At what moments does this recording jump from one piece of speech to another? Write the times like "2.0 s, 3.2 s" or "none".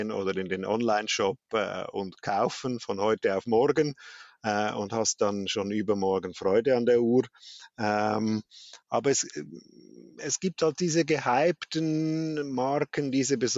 8.8 s